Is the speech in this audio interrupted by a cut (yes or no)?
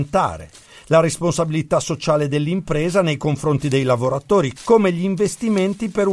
yes